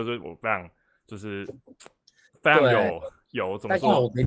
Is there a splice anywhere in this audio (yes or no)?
no